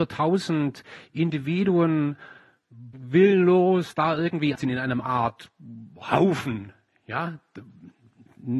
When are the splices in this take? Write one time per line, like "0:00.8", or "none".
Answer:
0:02.9
0:04.6